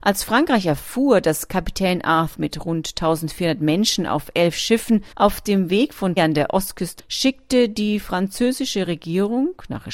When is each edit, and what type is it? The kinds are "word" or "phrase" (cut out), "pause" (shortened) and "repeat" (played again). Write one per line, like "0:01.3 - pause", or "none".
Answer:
0:02.3 - word
0:05.1 - pause
0:06.2 - phrase
0:07.0 - phrase

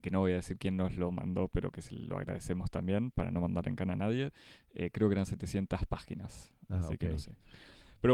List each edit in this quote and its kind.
none

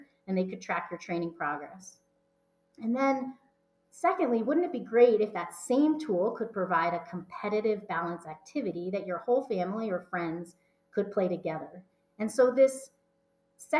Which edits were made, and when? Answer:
none

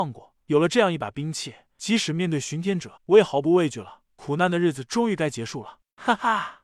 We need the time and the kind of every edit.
0:03.0 - pause

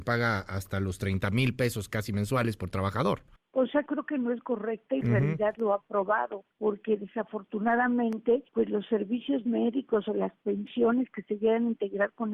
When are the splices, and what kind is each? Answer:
0:03.4 - pause
0:03.9 - phrase
0:04.4 - word
0:05.0 - word
0:06.5 - pause
0:08.5 - pause

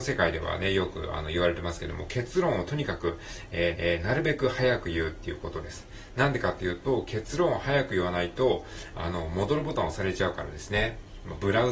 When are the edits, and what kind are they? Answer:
0:03.7 - repeat

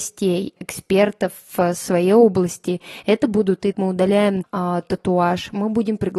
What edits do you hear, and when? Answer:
0:03.7 - phrase
0:04.4 - word

